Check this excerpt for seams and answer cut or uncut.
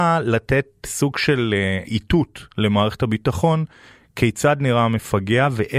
uncut